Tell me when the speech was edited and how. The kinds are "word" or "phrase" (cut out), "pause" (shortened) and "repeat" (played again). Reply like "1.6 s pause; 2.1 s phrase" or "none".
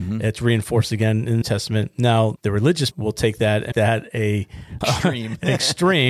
1.4 s word; 2.4 s word; 2.9 s word; 3.7 s word; 4.8 s word